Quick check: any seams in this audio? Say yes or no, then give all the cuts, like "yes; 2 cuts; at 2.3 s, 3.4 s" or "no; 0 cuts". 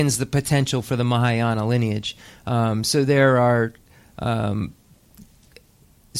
no; 0 cuts